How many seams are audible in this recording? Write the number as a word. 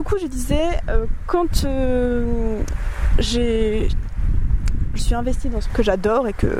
two